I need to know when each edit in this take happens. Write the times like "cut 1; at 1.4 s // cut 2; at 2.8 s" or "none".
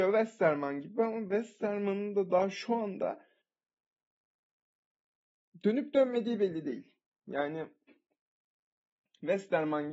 none